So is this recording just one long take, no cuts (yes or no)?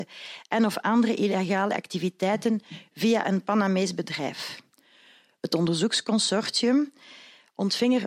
yes